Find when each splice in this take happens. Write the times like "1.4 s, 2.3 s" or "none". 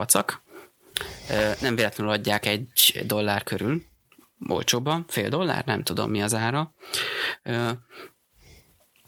none

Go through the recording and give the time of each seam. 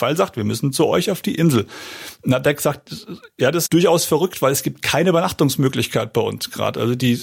3.7 s

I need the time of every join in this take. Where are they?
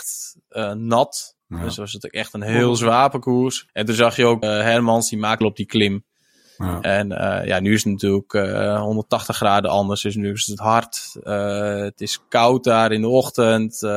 1.4 s, 3.7 s, 4.4 s, 5.4 s

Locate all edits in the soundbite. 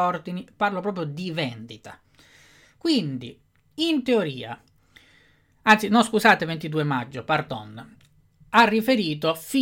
none

